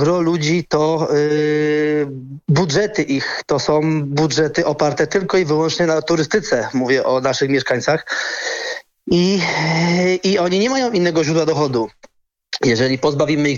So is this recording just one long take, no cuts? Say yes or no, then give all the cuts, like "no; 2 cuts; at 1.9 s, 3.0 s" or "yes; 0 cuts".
yes; 0 cuts